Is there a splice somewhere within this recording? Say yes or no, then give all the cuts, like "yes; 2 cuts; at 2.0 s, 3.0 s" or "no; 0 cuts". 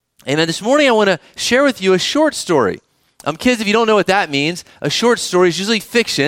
no; 0 cuts